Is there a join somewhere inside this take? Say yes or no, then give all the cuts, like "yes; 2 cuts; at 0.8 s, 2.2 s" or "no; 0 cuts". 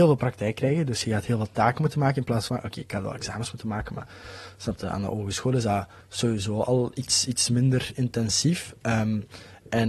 yes; 2 cuts; at 2.5 s, 6.0 s